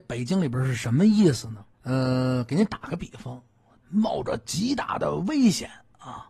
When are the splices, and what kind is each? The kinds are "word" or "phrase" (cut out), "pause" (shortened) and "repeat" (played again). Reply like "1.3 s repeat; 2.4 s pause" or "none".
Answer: 1.7 s pause; 3.8 s phrase